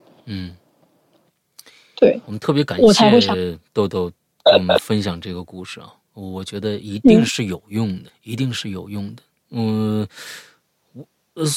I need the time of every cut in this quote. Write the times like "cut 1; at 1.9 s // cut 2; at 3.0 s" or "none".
cut 1; at 2.2 s // cut 2; at 8.1 s